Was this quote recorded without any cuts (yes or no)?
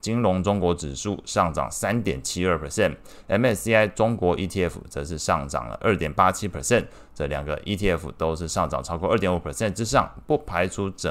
yes